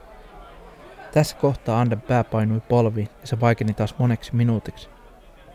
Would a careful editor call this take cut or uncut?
cut